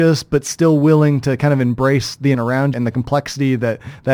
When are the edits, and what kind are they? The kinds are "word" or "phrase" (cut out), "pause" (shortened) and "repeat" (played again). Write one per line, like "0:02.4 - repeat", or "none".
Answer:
0:02.3 - word
0:02.7 - word